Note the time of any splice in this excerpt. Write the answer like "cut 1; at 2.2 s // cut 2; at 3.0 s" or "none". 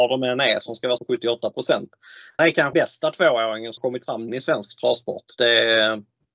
cut 1; at 1.0 s // cut 2; at 2.4 s // cut 3; at 2.7 s // cut 4; at 3.8 s // cut 5; at 4.3 s

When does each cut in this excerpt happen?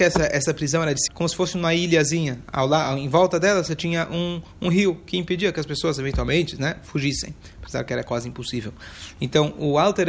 cut 1; at 1.1 s

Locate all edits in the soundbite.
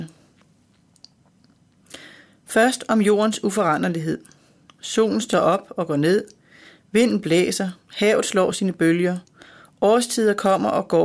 none

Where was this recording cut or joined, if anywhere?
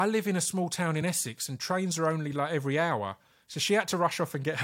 none

